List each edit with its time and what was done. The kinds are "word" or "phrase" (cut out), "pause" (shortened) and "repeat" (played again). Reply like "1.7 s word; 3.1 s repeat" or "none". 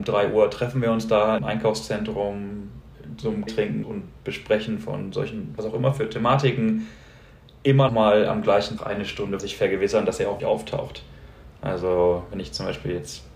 1.4 s word; 3.5 s word; 3.8 s word; 5.6 s word; 7.9 s word; 8.8 s word; 9.4 s word; 10.4 s word